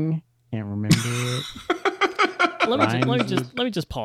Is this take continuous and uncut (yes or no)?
yes